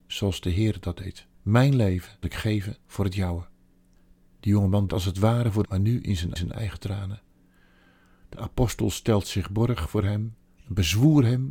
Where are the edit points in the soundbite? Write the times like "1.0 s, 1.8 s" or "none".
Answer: 1.3 s, 2.2 s, 2.8 s, 4.0 s, 4.9 s, 5.6 s, 6.4 s